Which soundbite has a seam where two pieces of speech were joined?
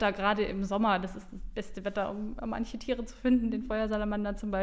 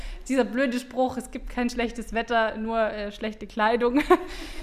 first; 1 cut; at 2.4 s

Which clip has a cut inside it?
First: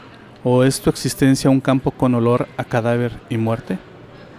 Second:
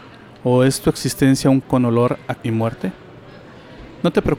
second; 2 cuts; at 1.6 s, 2.4 s

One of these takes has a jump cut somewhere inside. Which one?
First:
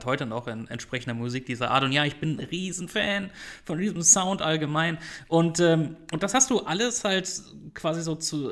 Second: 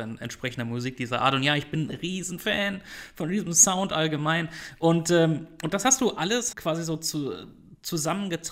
second; 1 cut; at 6.5 s

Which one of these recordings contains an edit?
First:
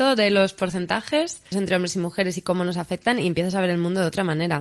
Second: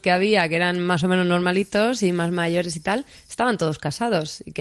first; 1 cut; at 1.5 s

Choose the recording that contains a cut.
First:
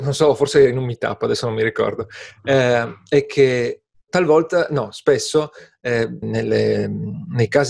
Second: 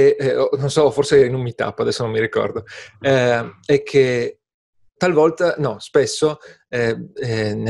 first; 2 cuts; at 3.9 s, 6.2 s

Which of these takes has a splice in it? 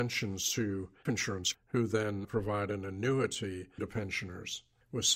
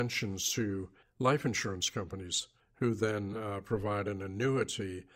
first; 4 cuts; at 1.1 s, 1.5 s, 2.2 s, 3.8 s

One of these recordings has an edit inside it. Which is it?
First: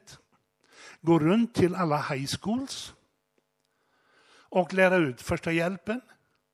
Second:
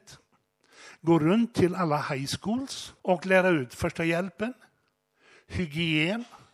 second; 1 cut; at 3.0 s

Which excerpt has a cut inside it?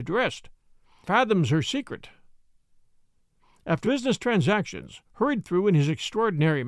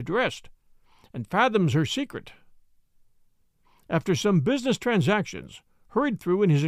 first; 3 cuts; at 1.0 s, 3.8 s, 5.0 s

